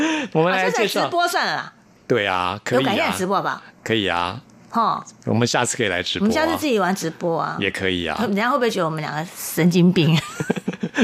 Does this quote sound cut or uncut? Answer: cut